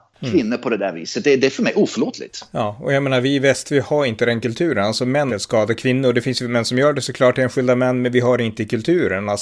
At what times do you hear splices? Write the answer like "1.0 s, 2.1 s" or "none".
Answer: 5.3 s